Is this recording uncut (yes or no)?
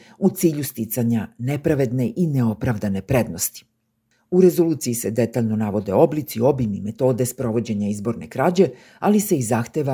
yes